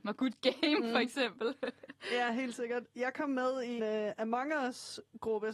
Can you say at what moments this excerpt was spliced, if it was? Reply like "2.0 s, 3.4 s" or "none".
3.8 s